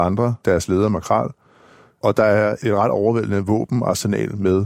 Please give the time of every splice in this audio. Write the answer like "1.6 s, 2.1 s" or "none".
none